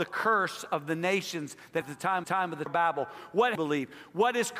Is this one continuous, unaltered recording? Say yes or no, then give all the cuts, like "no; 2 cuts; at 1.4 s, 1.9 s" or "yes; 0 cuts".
no; 4 cuts; at 1.8 s, 2.2 s, 2.7 s, 3.5 s